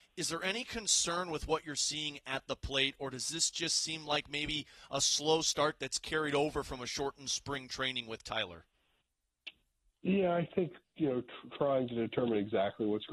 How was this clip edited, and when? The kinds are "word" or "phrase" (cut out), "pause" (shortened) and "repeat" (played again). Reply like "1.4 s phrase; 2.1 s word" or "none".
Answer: none